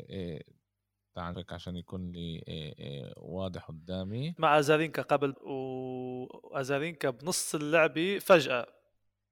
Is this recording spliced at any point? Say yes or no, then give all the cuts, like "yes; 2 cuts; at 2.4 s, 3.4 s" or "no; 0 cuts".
yes; 3 cuts; at 1.3 s, 4.4 s, 5.3 s